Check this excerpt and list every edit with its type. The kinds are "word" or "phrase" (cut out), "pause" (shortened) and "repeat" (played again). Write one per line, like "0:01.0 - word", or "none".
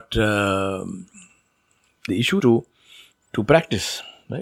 0:02.1 - word
0:02.4 - word
0:03.2 - word